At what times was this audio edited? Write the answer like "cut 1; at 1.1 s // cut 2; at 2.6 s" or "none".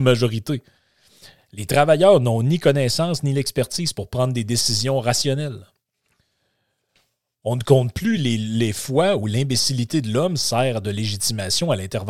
none